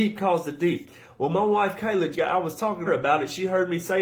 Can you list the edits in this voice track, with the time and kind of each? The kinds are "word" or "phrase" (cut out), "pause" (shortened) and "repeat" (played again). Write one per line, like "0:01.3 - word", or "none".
0:02.1 - word
0:02.9 - word